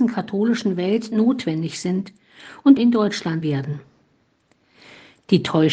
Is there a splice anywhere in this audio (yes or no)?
yes